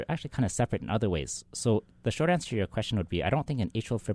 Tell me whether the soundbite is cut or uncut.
uncut